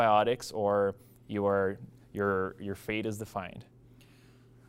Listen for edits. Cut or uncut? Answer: uncut